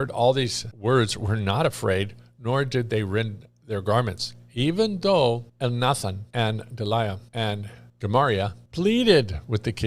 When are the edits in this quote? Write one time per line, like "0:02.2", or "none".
0:07.3